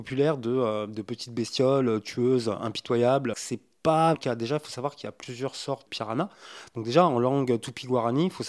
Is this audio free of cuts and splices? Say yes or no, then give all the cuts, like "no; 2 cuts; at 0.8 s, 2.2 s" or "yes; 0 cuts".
no; 3 cuts; at 3.3 s, 4.1 s, 5.9 s